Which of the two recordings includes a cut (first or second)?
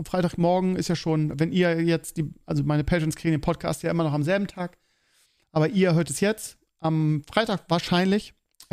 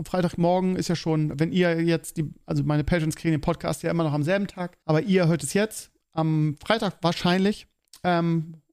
second